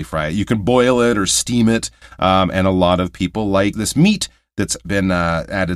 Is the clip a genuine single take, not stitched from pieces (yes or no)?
no